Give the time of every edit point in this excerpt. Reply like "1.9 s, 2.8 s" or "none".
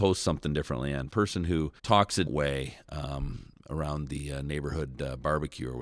1.1 s, 1.8 s, 2.3 s